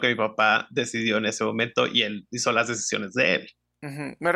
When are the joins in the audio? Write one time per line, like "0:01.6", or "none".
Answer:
none